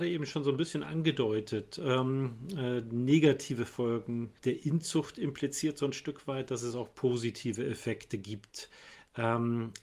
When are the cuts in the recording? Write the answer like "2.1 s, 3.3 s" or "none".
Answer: 4.4 s

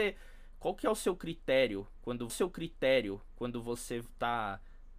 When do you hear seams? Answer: 2.3 s

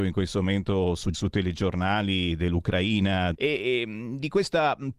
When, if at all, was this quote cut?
1.1 s, 3.3 s

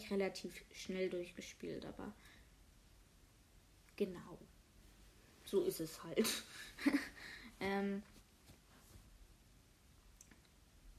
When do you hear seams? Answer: none

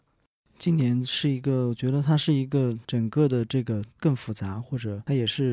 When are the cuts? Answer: 2.8 s

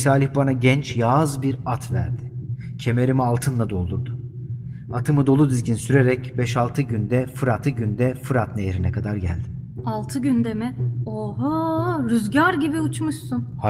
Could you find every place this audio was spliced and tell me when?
7.6 s

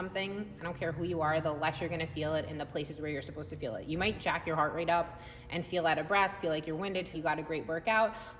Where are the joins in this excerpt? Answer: 7.1 s

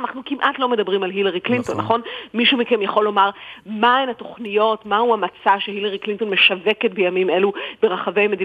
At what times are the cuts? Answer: none

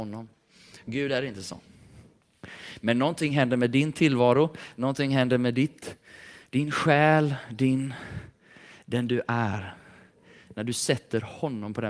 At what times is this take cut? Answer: none

